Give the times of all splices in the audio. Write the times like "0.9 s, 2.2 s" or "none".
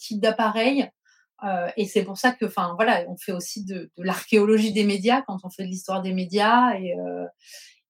none

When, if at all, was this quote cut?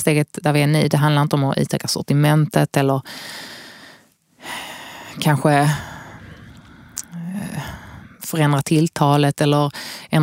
none

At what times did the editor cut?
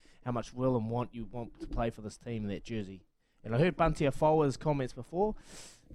none

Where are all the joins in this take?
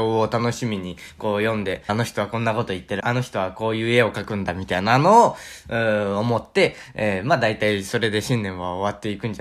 1.9 s, 3.0 s

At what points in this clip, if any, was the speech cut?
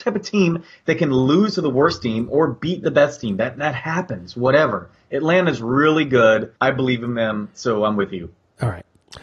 6.6 s

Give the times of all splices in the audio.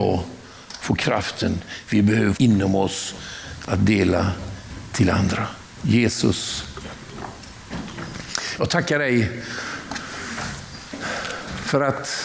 2.4 s

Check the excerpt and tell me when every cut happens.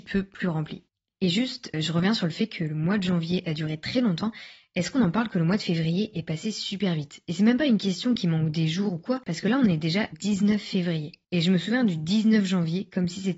1.7 s, 10.1 s

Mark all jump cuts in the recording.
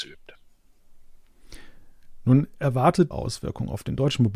3.1 s

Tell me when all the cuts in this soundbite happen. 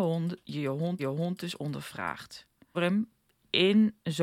1.0 s, 2.7 s

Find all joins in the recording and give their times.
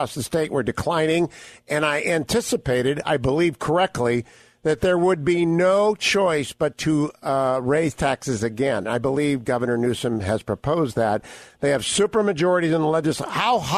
none

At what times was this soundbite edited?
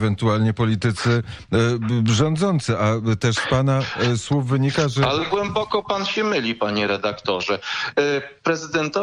none

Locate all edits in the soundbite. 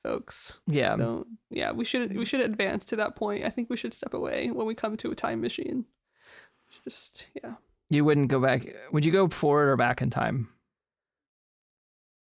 none

